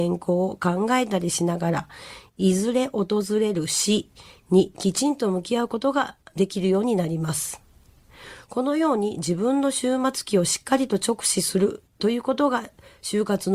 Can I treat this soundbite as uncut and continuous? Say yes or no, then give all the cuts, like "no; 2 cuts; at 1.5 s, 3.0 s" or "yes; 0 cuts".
yes; 0 cuts